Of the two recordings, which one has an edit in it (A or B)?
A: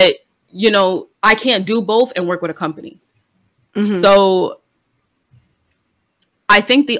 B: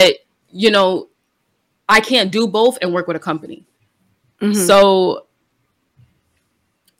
A